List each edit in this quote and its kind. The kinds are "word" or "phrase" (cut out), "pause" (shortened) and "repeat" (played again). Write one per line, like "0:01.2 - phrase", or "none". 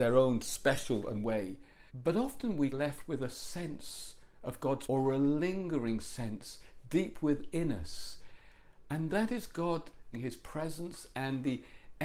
0:01.2 - word
0:01.9 - pause
0:02.7 - phrase
0:04.9 - word
0:10.1 - word